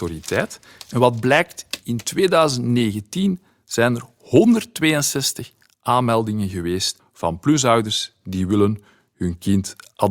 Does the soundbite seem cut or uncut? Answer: uncut